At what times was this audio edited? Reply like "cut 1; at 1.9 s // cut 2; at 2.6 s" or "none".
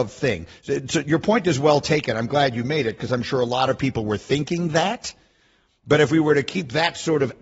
none